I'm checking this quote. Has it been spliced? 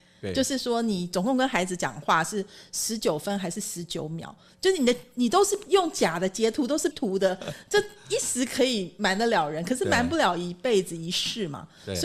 yes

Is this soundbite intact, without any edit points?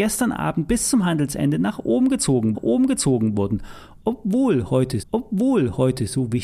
no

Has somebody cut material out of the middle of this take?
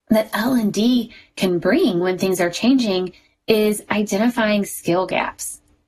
no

